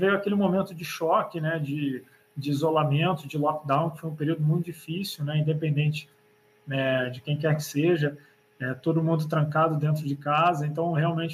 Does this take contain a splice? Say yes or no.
no